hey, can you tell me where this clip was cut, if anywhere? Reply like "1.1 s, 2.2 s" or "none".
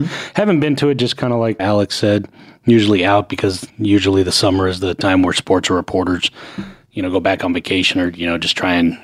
1.6 s, 3.7 s